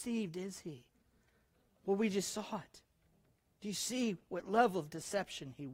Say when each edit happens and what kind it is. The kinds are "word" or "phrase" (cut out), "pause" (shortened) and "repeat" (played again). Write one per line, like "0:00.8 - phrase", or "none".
none